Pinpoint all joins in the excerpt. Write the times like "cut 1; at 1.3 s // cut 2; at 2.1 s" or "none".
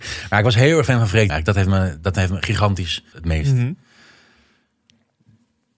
cut 1; at 1.3 s // cut 2; at 3.1 s